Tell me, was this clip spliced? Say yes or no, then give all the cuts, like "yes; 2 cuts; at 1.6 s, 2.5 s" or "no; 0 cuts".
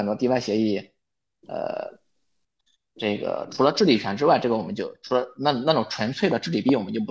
no; 0 cuts